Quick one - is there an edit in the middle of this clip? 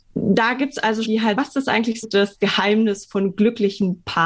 yes; 3 cuts; at 1.0 s, 1.4 s, 2.0 s

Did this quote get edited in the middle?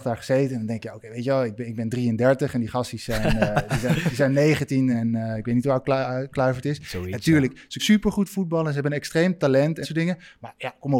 yes; 3 cuts; at 4.9 s, 7.8 s, 9.8 s

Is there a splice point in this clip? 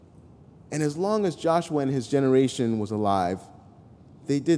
no; 0 cuts

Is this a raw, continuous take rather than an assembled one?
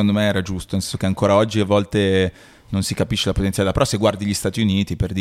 yes; 0 cuts

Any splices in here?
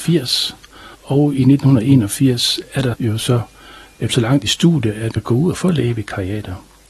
yes; 4 cuts; at 0.9 s, 2.9 s, 4.1 s, 5.1 s

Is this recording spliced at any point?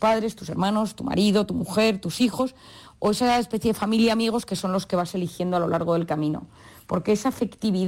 no; 0 cuts

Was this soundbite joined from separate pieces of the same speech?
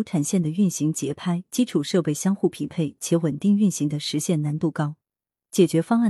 no; 0 cuts

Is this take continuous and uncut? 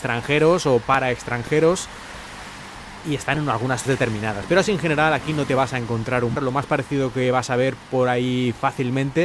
no; 2 cuts; at 3.9 s, 6.4 s

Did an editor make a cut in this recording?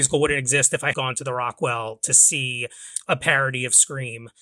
yes; 1 cut; at 0.9 s

